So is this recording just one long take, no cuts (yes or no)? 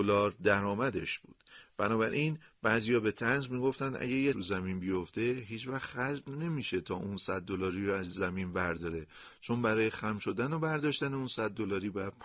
no